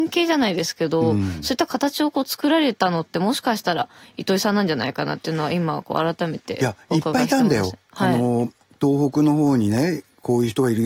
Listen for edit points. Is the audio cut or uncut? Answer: uncut